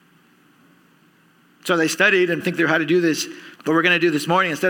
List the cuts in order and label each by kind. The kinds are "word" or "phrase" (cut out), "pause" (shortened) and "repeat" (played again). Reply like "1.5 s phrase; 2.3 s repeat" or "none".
2.4 s word; 3.6 s pause